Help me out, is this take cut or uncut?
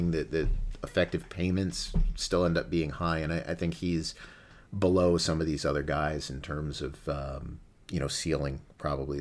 uncut